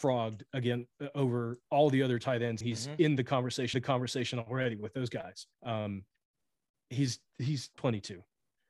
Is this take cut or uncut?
cut